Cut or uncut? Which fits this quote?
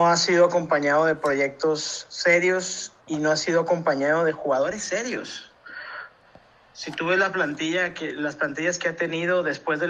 cut